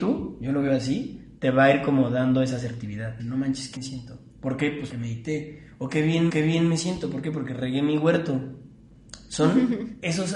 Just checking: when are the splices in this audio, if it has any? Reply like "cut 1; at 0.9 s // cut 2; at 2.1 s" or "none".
cut 1; at 1.4 s // cut 2; at 3.2 s // cut 3; at 3.8 s // cut 4; at 4.3 s // cut 5; at 4.9 s // cut 6; at 6.3 s